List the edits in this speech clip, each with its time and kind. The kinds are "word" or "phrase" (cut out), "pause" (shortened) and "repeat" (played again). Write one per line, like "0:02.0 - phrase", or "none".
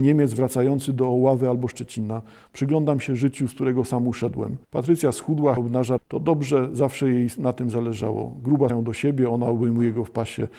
0:04.6 - pause
0:05.6 - word
0:06.0 - word
0:08.7 - word